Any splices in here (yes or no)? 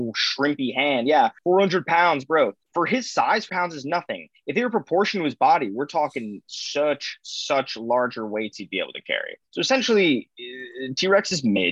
yes